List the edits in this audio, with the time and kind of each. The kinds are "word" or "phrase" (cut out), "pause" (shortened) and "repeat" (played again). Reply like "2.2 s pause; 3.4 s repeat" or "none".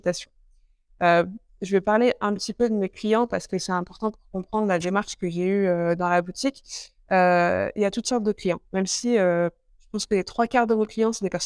none